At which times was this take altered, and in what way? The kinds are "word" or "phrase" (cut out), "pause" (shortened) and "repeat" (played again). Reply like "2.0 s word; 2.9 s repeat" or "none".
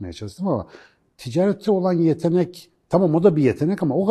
none